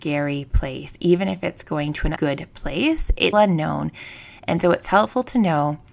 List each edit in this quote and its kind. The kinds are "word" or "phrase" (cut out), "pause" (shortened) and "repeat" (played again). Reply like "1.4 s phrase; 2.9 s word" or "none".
2.2 s word; 3.3 s word